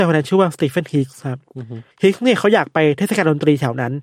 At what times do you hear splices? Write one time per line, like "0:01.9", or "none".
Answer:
0:01.9